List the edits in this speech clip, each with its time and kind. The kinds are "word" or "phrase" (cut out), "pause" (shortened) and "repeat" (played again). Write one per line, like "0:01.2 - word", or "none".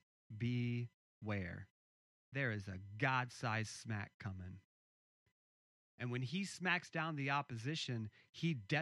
none